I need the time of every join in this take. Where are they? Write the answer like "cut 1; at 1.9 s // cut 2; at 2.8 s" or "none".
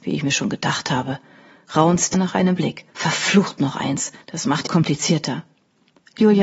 cut 1; at 2.1 s // cut 2; at 2.6 s // cut 3; at 2.9 s // cut 4; at 4.2 s // cut 5; at 4.7 s